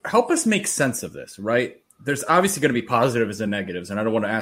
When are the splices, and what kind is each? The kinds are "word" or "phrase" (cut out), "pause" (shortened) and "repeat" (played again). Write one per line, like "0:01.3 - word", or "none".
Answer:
none